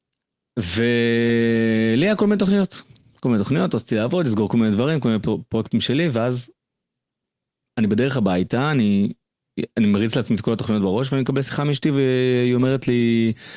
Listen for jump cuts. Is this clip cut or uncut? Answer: uncut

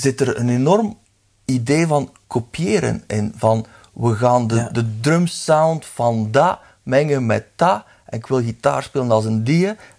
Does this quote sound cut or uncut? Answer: uncut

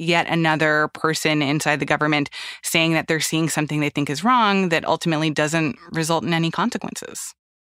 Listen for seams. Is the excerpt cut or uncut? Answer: uncut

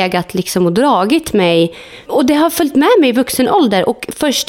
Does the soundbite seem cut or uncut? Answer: uncut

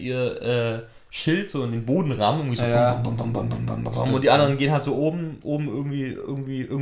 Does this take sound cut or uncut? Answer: uncut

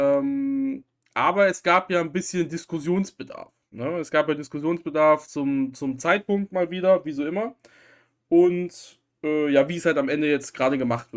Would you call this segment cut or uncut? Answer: uncut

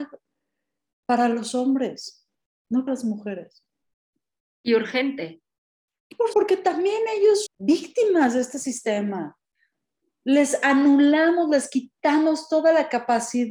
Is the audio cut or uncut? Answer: cut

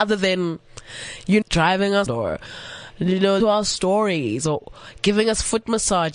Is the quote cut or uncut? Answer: cut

